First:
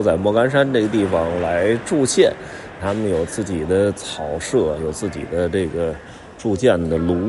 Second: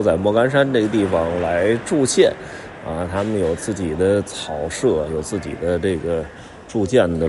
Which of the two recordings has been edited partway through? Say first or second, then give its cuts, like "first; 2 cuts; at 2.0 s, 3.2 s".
first; 1 cut; at 2.8 s